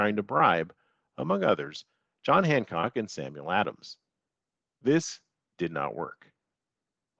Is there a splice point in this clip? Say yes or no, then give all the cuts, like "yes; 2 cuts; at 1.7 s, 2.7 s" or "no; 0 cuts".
no; 0 cuts